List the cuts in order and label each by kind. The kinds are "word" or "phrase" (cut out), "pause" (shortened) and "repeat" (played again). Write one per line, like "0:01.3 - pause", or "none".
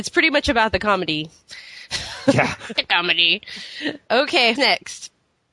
0:02.8 - phrase
0:04.5 - word

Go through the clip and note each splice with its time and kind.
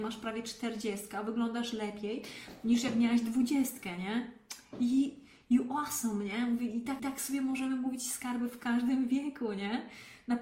0:07.0 - repeat

